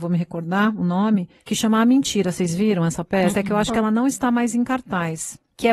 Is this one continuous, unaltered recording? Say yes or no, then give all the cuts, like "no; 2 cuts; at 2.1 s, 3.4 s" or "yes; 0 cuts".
yes; 0 cuts